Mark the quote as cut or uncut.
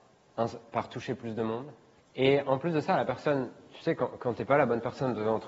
cut